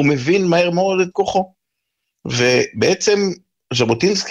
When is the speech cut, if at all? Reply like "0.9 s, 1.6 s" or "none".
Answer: 1.1 s